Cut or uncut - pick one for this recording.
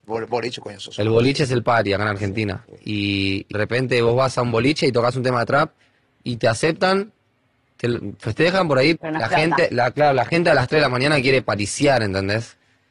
cut